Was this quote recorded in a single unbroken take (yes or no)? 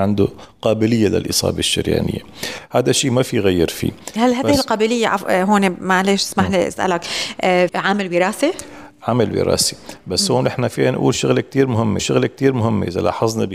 no